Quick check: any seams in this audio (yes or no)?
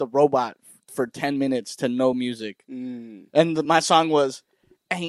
no